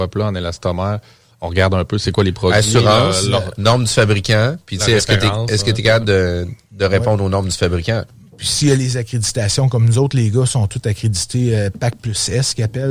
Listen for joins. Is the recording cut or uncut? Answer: uncut